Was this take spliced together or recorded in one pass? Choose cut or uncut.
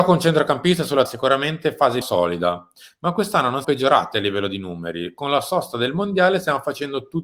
cut